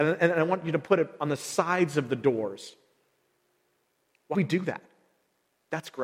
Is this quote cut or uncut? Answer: cut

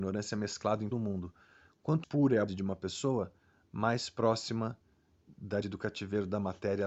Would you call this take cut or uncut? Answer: cut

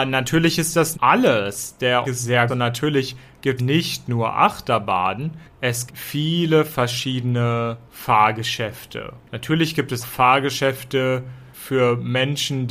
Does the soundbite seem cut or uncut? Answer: cut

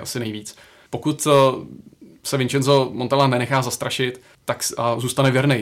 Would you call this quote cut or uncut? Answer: cut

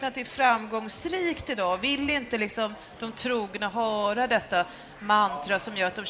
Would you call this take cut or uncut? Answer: uncut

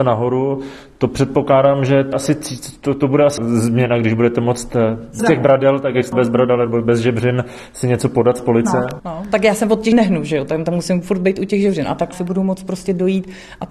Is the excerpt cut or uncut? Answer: cut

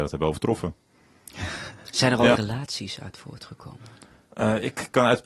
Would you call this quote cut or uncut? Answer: cut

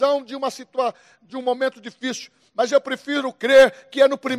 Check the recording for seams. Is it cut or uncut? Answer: cut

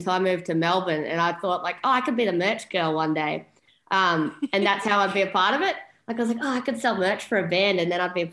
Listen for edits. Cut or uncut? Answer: uncut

